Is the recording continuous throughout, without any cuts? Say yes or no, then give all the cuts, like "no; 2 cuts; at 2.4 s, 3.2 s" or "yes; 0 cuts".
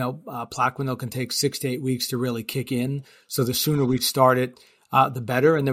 yes; 0 cuts